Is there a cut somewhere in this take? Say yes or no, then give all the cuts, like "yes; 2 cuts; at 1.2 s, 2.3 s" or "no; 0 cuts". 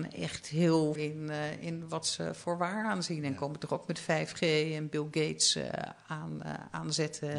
yes; 1 cut; at 1.0 s